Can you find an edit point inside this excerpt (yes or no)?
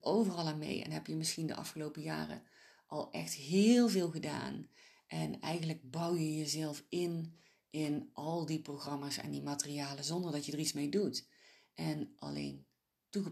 no